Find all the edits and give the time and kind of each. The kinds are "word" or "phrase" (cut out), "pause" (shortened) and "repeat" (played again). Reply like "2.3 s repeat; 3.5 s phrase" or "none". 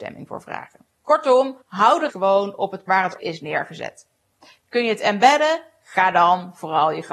1.6 s pause; 2.1 s word; 2.9 s word; 3.2 s word